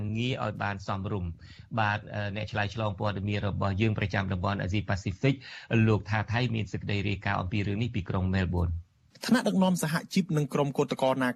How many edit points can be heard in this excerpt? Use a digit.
1